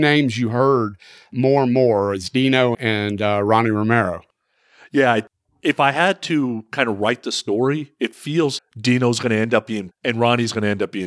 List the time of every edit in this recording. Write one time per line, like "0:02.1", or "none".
0:02.7
0:08.6
0:09.9

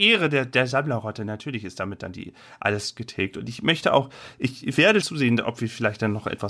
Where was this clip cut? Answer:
0:05.0

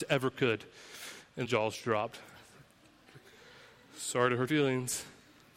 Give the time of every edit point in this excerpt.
0:01.4
0:04.5

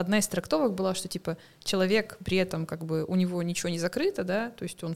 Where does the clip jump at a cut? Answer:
none

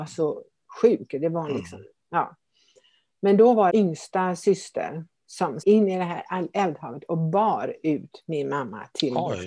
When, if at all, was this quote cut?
0:03.7
0:05.6

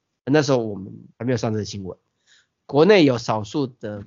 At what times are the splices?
0:01.1

